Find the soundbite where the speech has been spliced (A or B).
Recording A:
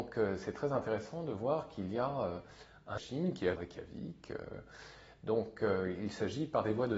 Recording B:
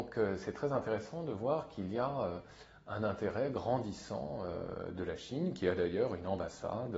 A